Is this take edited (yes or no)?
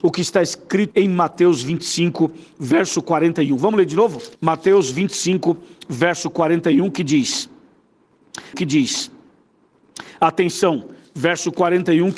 yes